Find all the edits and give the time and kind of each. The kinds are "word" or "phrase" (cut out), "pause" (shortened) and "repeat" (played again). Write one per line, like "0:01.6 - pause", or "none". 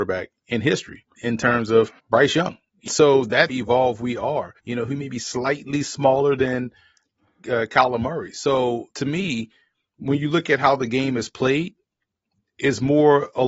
0:01.2 - word
0:02.0 - pause
0:02.9 - phrase
0:03.5 - phrase
0:04.6 - pause
0:08.9 - pause